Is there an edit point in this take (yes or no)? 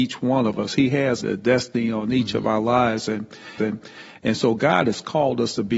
yes